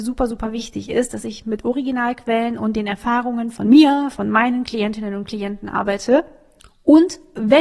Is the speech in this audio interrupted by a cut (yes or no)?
no